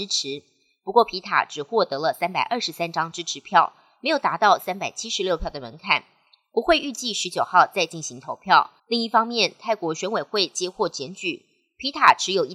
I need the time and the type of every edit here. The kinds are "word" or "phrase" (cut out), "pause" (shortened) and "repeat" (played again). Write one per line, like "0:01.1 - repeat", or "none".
0:08.8 - pause

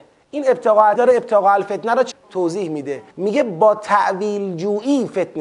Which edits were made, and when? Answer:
0:01.0 - word
0:02.1 - word
0:03.1 - pause

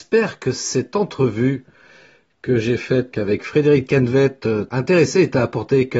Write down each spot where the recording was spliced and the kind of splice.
0:03.1 - word
0:04.7 - word

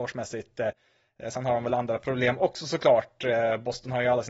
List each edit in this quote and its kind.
none

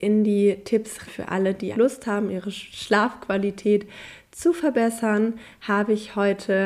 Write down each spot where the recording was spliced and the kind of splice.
0:01.1 - phrase
0:01.7 - word

